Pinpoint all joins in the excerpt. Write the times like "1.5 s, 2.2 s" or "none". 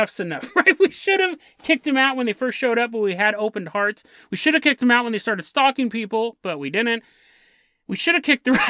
none